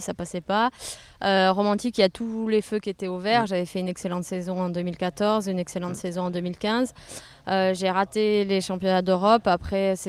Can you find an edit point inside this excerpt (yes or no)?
no